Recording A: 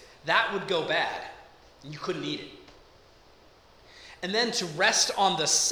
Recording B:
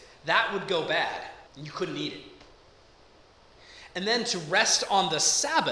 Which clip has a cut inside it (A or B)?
B